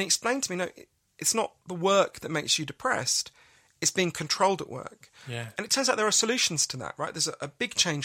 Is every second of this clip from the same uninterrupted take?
yes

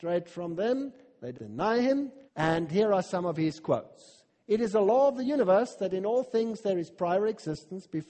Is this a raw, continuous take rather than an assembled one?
no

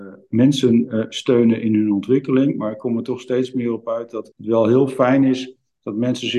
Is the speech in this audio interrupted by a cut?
yes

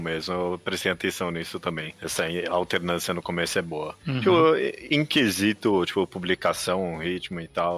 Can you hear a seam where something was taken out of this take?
no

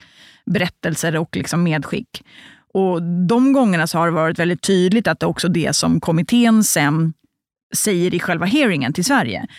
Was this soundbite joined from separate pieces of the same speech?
no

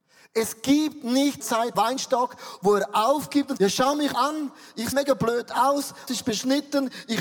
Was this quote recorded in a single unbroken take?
no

